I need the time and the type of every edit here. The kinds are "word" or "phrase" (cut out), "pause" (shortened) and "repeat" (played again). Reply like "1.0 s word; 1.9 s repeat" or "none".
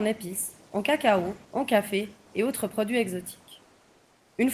1.4 s pause